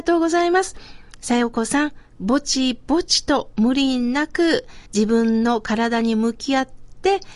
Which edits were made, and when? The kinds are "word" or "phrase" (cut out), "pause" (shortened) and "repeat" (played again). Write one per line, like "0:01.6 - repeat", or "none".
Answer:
0:04.9 - pause